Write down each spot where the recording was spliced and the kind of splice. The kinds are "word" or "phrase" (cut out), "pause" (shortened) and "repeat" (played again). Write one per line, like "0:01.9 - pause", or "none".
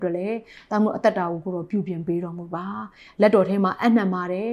none